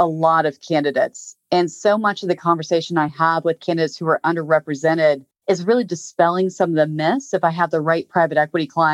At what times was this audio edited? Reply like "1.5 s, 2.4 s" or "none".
none